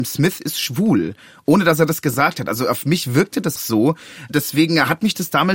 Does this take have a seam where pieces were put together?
yes; 1 cut; at 3.6 s

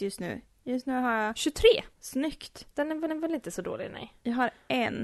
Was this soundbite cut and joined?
yes; 2 cuts; at 1.9 s, 3.1 s

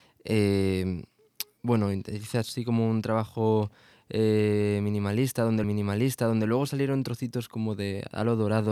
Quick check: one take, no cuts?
no; 1 cut; at 5.6 s

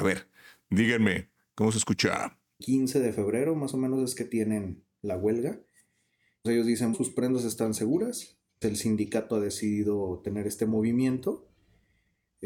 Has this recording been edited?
yes; 4 cuts; at 2.6 s, 6.4 s, 6.9 s, 8.6 s

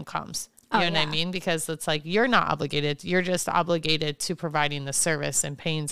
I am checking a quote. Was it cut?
no; 0 cuts

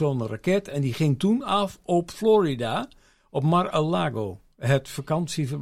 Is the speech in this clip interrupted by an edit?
no; 0 cuts

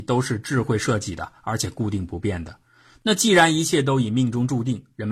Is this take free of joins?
yes; 0 cuts

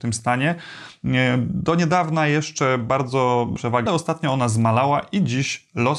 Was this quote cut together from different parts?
yes; 2 cuts; at 3.6 s, 3.9 s

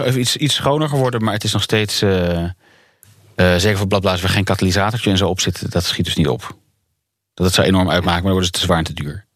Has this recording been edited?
no; 0 cuts

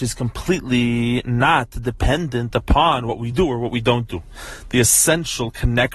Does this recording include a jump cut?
no; 0 cuts

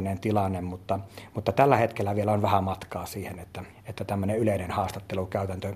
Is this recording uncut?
no; 1 cut; at 3.7 s

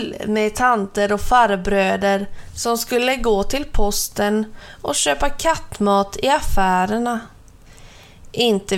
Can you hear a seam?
no; 0 cuts

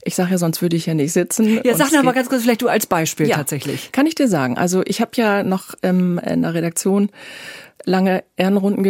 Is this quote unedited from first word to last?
yes; 0 cuts

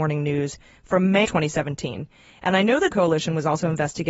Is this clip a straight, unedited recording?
no; 2 cuts; at 1.2 s, 2.9 s

